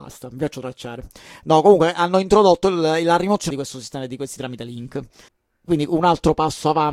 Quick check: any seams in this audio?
yes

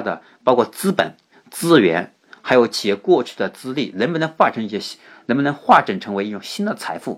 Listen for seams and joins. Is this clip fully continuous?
yes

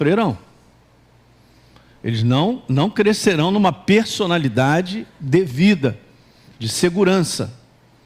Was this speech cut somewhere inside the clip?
no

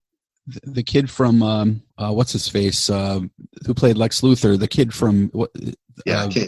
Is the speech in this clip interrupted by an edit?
yes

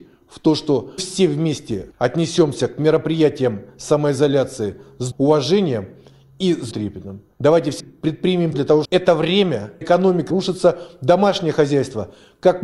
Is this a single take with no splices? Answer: no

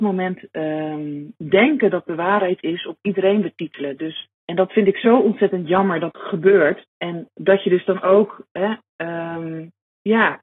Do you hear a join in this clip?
yes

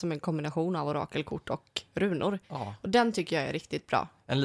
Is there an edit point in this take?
yes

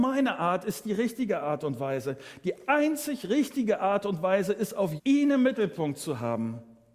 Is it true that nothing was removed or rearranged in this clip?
no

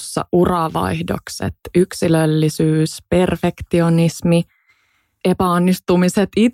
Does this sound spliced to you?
yes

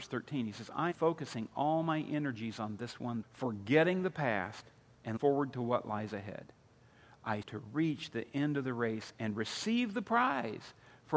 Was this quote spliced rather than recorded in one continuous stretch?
yes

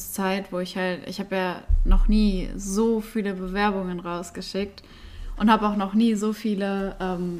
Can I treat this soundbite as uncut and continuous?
yes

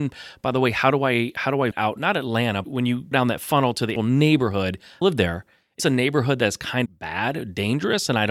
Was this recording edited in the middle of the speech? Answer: yes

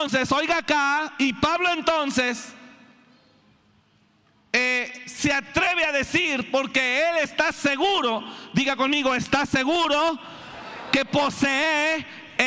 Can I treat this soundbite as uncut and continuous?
yes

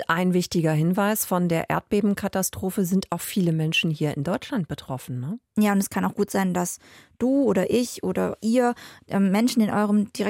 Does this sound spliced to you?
no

